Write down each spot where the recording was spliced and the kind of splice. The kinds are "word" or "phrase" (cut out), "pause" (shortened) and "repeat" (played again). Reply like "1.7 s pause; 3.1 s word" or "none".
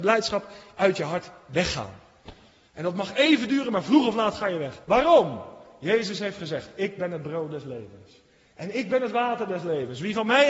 4.8 s pause